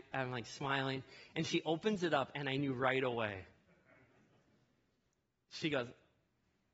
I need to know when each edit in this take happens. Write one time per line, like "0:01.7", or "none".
none